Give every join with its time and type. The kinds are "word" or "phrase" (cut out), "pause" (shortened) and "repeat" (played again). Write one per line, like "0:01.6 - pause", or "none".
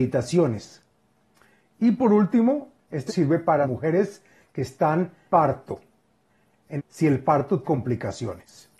0:03.1 - word
0:03.6 - word
0:05.3 - word
0:06.8 - word
0:07.6 - word